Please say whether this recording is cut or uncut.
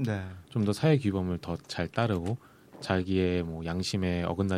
uncut